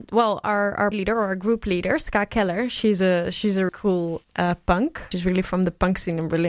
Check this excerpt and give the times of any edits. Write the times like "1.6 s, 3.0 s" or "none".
0.9 s, 3.7 s, 5.1 s